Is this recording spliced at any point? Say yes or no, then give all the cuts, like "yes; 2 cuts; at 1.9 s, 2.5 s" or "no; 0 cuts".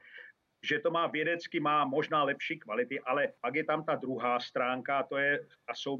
yes; 1 cut; at 3.4 s